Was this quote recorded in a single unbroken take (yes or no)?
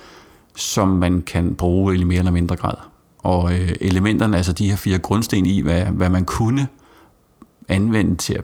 yes